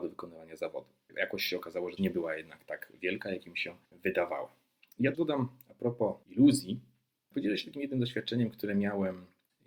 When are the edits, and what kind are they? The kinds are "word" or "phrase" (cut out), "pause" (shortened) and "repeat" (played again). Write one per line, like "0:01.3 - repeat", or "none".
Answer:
0:02.0 - phrase
0:03.9 - pause
0:05.1 - word
0:06.2 - word
0:07.3 - word